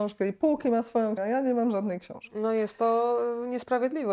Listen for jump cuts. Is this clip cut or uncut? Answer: cut